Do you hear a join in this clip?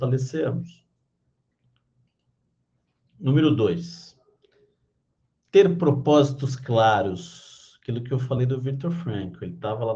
no; 0 cuts

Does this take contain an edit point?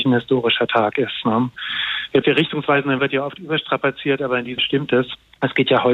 yes; 3 cuts; at 2.2 s, 3.0 s, 4.6 s

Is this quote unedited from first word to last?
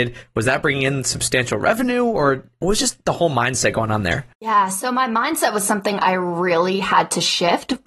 no; 1 cut; at 4.3 s

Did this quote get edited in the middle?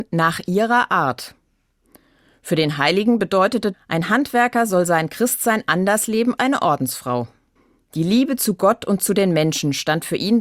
yes; 3 cuts; at 3.7 s, 6.4 s, 7.6 s

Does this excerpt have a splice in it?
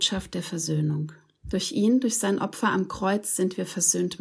no; 0 cuts

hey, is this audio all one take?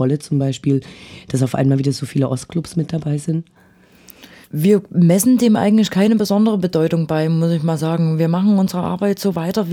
yes; 0 cuts

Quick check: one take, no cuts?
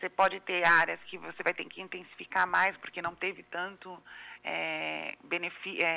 yes; 0 cuts

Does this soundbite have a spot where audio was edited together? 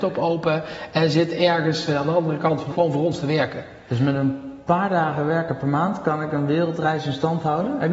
yes; 1 cut; at 2.7 s

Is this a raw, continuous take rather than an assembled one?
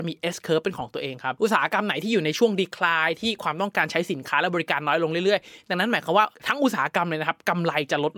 yes; 0 cuts

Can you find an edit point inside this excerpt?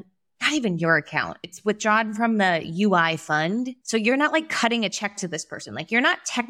yes; 1 cut; at 3.8 s

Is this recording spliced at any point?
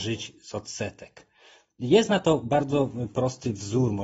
no; 0 cuts

